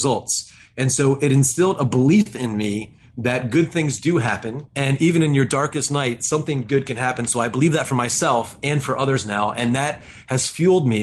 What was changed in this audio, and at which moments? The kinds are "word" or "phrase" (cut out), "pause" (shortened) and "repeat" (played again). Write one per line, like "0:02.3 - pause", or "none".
0:04.7 - pause